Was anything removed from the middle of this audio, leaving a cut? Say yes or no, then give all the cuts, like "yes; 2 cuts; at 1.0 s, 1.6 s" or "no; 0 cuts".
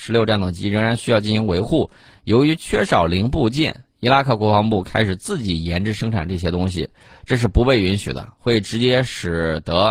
no; 0 cuts